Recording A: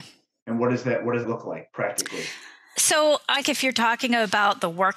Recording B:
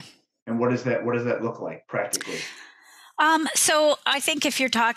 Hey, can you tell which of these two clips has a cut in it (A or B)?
A